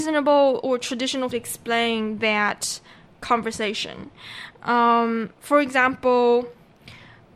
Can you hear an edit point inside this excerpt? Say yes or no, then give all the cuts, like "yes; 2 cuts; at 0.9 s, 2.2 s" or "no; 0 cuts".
yes; 2 cuts; at 1.3 s, 5.3 s